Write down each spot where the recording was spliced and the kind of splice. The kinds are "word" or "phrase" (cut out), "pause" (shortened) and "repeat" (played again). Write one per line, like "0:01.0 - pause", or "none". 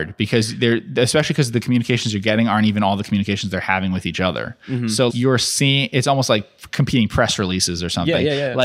0:05.1 - word